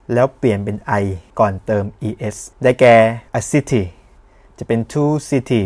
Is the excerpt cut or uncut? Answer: cut